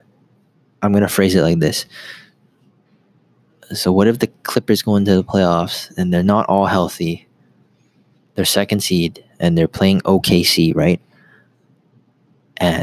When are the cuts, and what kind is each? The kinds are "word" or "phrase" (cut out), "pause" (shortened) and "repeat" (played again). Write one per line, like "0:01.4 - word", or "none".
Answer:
none